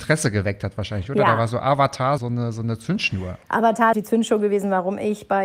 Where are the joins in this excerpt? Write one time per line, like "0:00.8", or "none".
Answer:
0:02.2
0:03.4
0:03.9